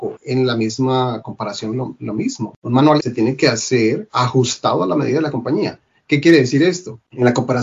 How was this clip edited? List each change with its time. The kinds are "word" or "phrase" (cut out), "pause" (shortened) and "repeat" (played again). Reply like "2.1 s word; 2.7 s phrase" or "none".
none